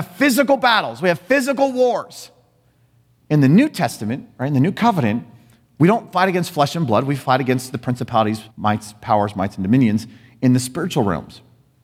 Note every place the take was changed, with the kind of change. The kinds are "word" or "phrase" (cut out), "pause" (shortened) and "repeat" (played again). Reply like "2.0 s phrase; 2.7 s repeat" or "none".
8.5 s pause